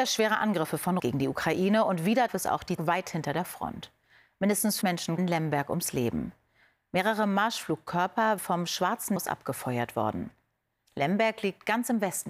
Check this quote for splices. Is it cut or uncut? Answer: cut